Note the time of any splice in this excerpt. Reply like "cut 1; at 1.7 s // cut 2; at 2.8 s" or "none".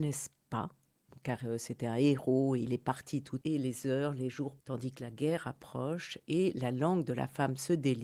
cut 1; at 3.4 s // cut 2; at 4.6 s